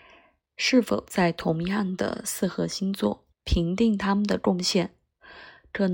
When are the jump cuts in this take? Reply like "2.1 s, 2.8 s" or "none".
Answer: 3.3 s